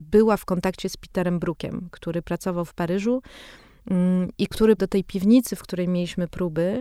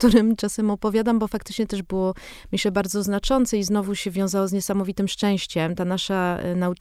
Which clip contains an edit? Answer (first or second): first